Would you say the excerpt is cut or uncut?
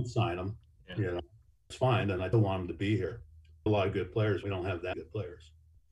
cut